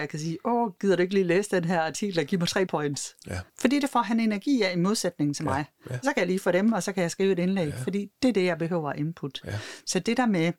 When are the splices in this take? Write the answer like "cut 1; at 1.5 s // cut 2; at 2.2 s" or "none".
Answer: cut 1; at 2.7 s // cut 2; at 3.5 s